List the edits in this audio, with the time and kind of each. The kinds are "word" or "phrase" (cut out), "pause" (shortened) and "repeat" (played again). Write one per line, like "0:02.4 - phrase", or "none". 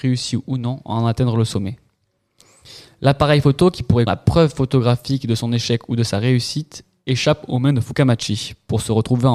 0:04.1 - word